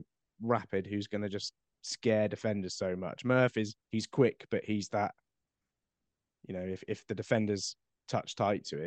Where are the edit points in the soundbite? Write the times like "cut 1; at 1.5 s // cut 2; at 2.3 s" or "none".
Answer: cut 1; at 3.8 s

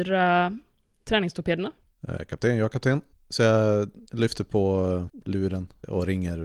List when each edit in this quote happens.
cut 1; at 3.1 s // cut 2; at 5.2 s

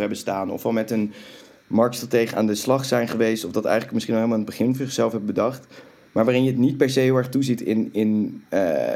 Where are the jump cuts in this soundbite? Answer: none

